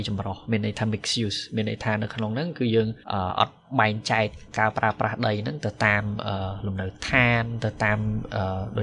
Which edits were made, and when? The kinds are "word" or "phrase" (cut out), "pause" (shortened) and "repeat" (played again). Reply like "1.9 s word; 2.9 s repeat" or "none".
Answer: 3.0 s pause